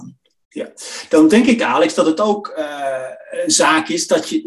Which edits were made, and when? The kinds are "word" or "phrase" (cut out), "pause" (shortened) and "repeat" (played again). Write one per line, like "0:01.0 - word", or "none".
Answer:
none